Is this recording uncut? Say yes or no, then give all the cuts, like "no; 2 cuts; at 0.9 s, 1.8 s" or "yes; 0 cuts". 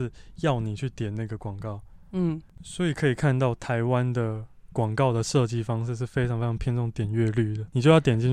yes; 0 cuts